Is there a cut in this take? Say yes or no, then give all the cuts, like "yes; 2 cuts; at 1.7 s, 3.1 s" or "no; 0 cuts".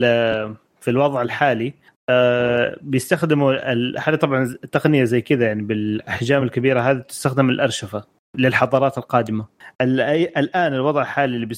no; 0 cuts